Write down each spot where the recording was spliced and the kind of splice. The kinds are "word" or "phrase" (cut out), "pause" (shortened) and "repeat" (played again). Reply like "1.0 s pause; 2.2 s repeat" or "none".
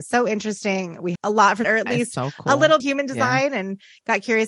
1.2 s phrase; 1.6 s word; 2.8 s phrase